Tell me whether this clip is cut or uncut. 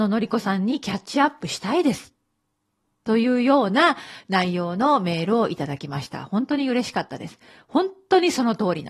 uncut